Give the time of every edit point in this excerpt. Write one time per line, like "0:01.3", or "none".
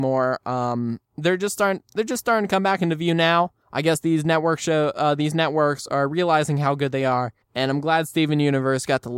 0:01.1
0:03.6
0:07.4